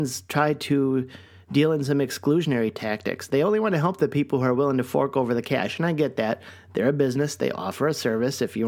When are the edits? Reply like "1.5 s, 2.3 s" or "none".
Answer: none